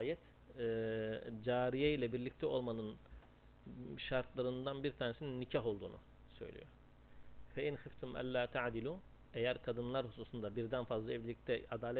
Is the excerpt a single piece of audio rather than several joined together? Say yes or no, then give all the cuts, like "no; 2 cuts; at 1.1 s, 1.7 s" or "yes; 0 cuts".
yes; 0 cuts